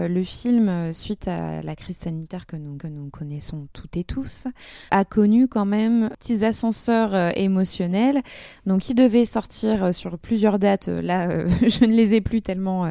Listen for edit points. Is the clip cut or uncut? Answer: cut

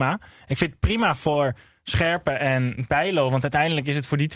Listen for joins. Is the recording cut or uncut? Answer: uncut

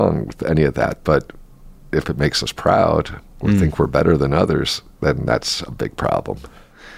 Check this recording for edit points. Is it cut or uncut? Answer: uncut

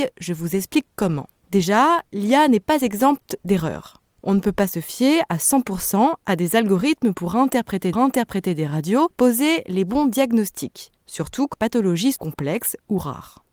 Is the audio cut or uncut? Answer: cut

